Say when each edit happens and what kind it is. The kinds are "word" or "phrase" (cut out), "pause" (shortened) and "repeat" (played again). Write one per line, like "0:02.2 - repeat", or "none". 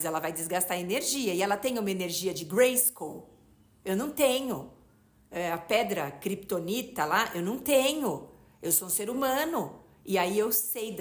none